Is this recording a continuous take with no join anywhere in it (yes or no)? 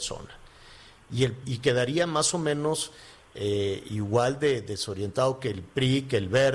no